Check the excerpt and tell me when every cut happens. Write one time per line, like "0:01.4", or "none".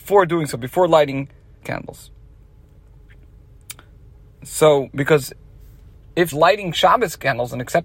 0:01.6
0:06.3

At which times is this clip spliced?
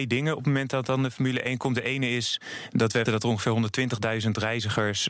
0:03.1

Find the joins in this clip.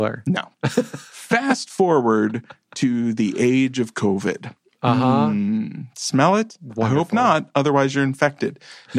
none

